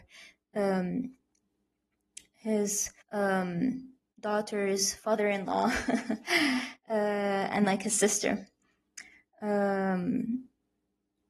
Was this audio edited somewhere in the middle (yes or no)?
yes